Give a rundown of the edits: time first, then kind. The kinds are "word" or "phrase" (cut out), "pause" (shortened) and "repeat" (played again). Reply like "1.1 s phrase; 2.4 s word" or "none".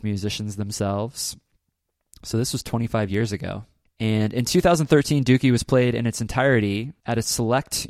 none